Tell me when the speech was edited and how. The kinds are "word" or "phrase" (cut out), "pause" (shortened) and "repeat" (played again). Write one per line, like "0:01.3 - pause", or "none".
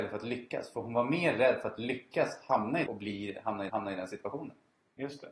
0:02.9 - phrase
0:03.7 - repeat